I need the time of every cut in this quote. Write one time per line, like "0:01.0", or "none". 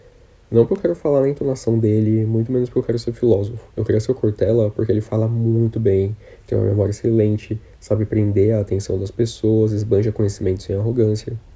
0:03.7